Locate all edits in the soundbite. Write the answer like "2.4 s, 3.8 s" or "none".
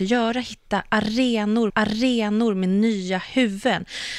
1.7 s